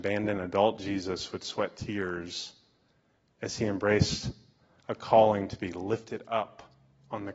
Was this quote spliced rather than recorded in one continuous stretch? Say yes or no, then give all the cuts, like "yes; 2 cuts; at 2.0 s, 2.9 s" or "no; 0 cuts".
no; 0 cuts